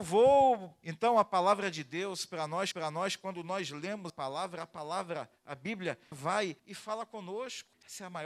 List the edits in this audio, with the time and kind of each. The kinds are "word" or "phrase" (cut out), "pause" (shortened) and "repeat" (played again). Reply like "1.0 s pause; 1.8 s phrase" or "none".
2.7 s repeat; 4.1 s word; 6.1 s word; 6.6 s pause